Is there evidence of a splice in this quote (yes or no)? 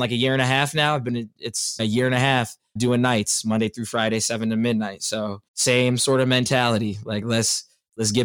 yes